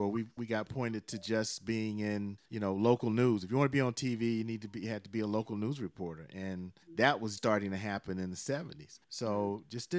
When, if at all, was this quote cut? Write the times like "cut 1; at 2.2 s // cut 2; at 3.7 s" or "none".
cut 1; at 2.5 s // cut 2; at 6.8 s // cut 3; at 7.4 s // cut 4; at 9.0 s